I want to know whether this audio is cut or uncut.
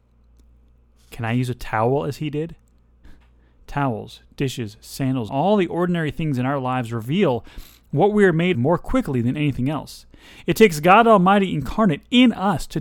cut